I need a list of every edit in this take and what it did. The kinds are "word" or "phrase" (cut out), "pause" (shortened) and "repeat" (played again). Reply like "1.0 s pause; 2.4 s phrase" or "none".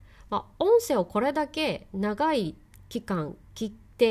none